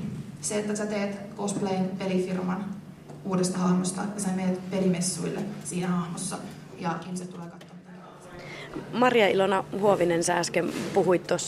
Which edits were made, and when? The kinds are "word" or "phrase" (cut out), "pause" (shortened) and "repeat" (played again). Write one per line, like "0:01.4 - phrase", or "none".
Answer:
none